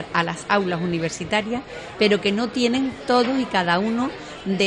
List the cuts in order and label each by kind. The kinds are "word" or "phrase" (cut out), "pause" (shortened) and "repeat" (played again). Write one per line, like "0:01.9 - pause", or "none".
none

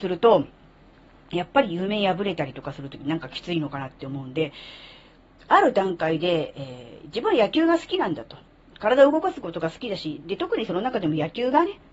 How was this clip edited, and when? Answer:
none

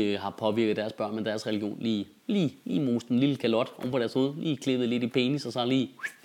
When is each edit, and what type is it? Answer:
none

